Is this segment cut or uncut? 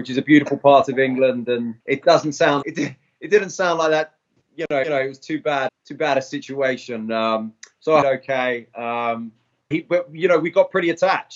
cut